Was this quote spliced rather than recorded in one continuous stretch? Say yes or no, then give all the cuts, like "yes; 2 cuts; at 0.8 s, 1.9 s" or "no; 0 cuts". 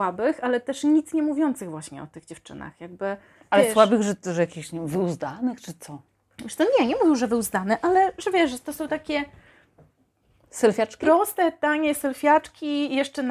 no; 0 cuts